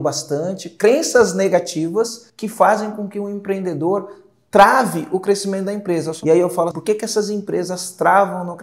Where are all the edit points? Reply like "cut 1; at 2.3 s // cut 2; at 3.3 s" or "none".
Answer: cut 1; at 2.3 s // cut 2; at 6.7 s